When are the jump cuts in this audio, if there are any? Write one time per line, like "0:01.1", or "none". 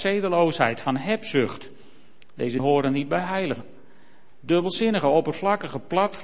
0:02.6